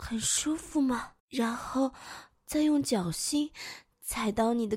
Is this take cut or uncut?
cut